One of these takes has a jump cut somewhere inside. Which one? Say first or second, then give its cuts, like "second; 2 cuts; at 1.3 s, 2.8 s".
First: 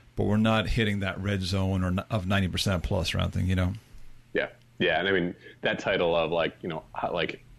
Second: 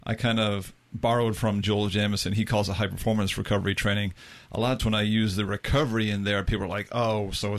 second; 1 cut; at 4.8 s